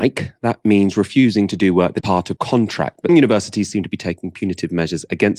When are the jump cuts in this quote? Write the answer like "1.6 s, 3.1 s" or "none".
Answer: 2.0 s, 2.4 s, 3.1 s